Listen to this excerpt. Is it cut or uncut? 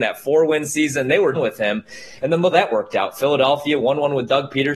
cut